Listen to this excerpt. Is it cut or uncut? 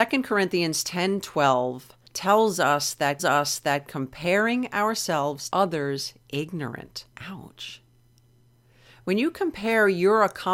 cut